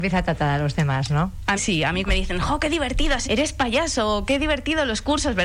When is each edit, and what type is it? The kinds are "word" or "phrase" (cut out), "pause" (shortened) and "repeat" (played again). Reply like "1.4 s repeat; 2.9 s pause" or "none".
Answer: 1.6 s word; 2.1 s word; 3.2 s word

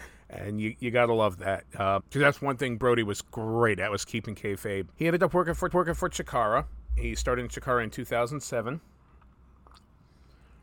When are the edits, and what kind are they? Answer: 2.0 s word; 4.9 s pause; 5.7 s repeat

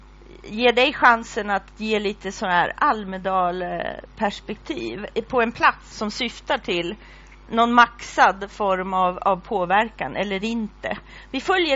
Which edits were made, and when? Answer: 5.9 s word; 7.5 s word

